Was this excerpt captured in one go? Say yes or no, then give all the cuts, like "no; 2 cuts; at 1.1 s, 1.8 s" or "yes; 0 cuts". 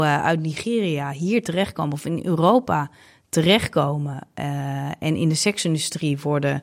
yes; 0 cuts